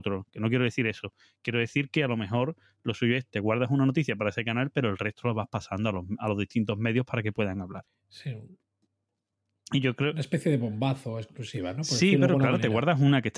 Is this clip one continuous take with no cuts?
yes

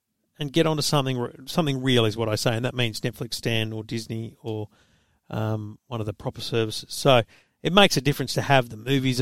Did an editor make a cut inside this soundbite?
no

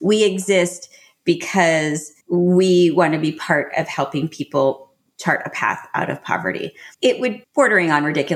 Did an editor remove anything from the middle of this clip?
yes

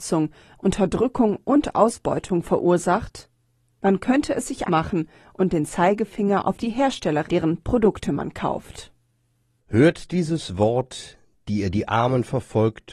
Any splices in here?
yes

